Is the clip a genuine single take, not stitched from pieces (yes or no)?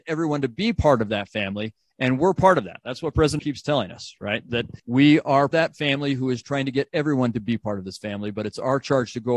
no